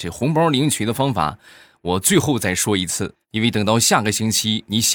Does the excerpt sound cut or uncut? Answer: cut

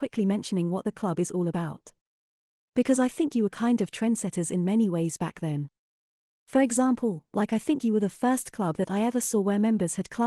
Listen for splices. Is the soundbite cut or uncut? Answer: uncut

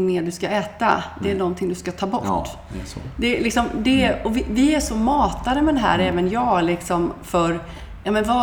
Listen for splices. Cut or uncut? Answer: uncut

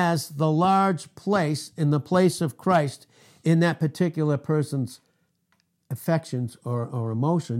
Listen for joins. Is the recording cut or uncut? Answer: uncut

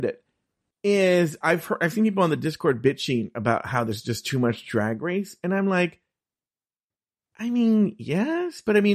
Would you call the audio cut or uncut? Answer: uncut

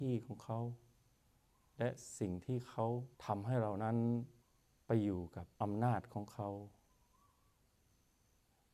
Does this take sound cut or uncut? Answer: cut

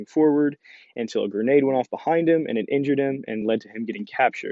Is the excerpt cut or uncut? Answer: uncut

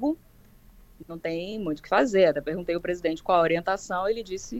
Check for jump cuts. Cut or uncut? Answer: uncut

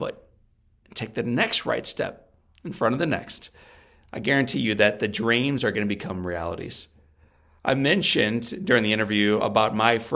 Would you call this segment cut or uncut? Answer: uncut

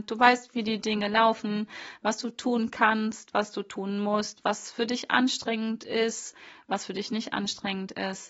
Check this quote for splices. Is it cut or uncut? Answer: uncut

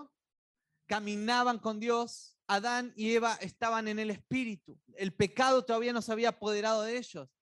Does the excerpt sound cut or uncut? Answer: cut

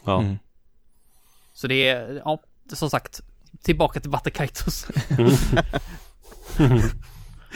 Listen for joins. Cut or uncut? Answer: uncut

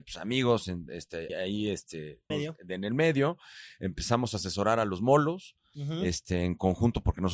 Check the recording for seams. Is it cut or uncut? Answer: cut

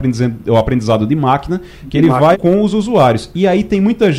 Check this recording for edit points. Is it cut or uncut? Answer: cut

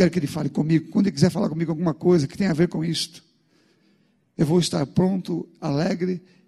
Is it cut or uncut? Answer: uncut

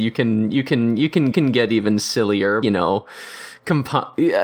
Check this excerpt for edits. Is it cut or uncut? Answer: cut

